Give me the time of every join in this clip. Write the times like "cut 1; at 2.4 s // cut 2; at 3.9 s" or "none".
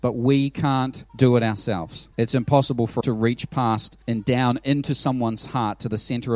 cut 1; at 1.1 s // cut 2; at 2.1 s // cut 3; at 3.0 s // cut 4; at 4.0 s